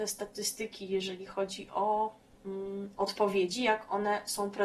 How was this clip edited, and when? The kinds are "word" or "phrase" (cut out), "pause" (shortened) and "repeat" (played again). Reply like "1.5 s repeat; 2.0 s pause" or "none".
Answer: none